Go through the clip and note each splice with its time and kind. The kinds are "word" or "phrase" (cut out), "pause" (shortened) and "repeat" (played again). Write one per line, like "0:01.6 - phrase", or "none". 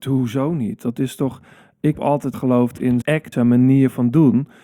0:01.9 - word
0:02.3 - phrase
0:03.0 - word
0:03.3 - phrase

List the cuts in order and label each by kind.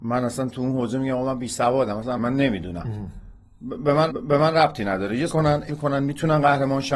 0:02.2 - phrase
0:04.1 - repeat
0:05.3 - phrase
0:05.7 - word

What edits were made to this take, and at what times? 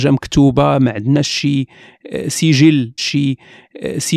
0:03.0 - repeat

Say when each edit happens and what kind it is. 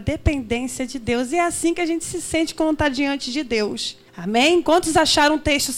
0:04.1 - pause

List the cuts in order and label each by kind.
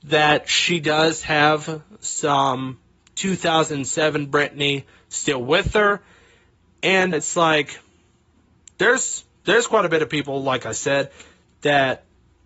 0:07.1 - word

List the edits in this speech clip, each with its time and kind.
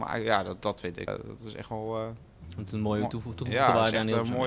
0:01.1 - word

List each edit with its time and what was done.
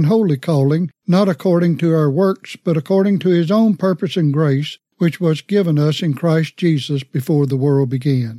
0:01.0 - pause
0:04.9 - pause

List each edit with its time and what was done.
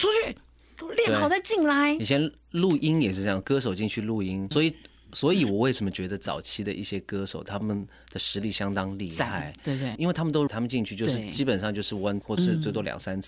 0:04.5 - word
0:10.5 - word
0:12.2 - word

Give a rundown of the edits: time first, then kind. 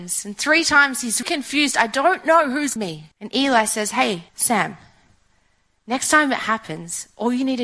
0:01.2 - word
0:02.8 - word
0:03.1 - pause
0:04.3 - pause

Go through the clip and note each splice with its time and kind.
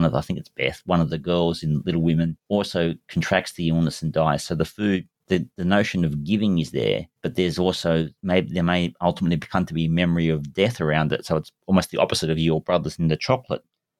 0:02.4 - pause
0:05.1 - pause
0:07.2 - pause
0:08.2 - pause

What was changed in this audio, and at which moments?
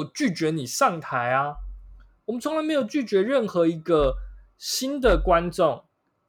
none

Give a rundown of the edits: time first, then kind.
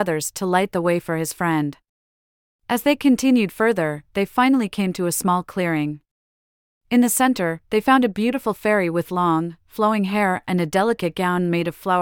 none

